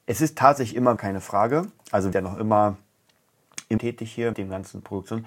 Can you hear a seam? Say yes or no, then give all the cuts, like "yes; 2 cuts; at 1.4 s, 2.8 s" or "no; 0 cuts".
yes; 4 cuts; at 1.0 s, 2.1 s, 3.8 s, 4.3 s